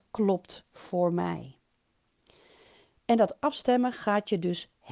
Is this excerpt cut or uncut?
uncut